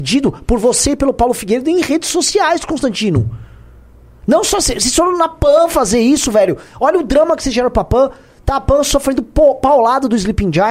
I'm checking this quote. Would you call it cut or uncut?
uncut